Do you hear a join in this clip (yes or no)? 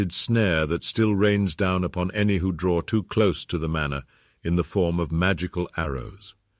no